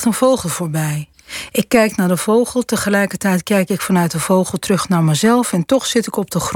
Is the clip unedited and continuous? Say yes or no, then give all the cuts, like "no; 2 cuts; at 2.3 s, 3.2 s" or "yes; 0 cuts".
yes; 0 cuts